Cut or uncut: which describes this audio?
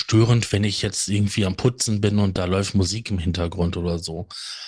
uncut